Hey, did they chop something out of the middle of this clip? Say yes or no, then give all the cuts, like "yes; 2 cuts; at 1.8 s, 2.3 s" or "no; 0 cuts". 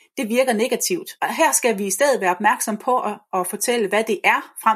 yes; 1 cut; at 1.2 s